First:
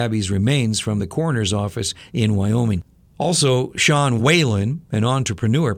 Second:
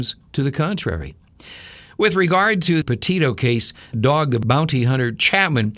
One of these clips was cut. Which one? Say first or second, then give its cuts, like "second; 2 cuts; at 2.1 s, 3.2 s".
second; 2 cuts; at 2.8 s, 3.9 s